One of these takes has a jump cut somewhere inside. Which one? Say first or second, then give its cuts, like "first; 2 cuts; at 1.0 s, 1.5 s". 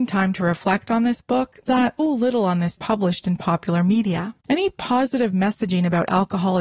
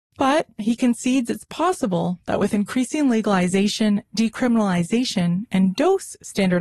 first; 4 cuts; at 1.7 s, 2.0 s, 2.8 s, 4.4 s